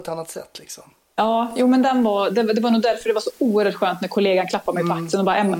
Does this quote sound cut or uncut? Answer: uncut